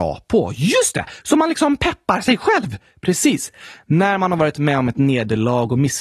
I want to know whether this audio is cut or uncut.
uncut